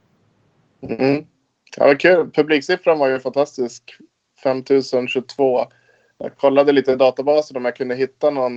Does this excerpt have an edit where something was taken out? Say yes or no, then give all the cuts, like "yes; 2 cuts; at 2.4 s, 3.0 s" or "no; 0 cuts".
no; 0 cuts